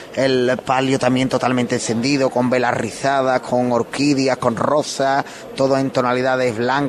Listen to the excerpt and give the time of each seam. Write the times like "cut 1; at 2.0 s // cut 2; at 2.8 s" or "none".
none